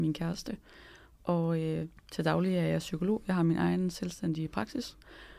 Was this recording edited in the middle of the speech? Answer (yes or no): no